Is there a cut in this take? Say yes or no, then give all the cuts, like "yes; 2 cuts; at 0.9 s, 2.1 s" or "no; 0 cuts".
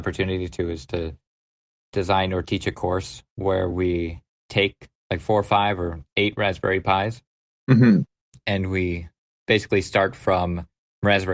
no; 0 cuts